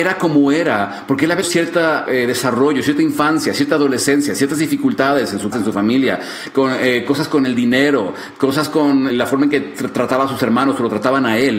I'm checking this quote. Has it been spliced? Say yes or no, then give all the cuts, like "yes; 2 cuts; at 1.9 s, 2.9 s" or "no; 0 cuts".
yes; 4 cuts; at 1.4 s, 2.1 s, 5.5 s, 9.1 s